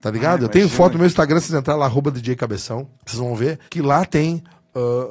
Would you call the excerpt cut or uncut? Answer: cut